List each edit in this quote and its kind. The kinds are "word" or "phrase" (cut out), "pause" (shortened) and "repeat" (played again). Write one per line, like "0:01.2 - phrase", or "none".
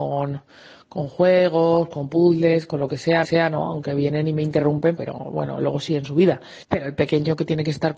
0:03.2 - repeat
0:05.0 - word
0:06.6 - pause